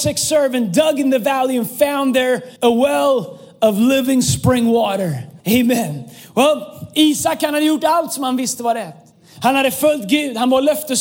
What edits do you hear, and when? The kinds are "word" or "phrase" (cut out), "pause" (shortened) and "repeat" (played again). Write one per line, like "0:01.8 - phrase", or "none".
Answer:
0:02.6 - pause
0:05.4 - pause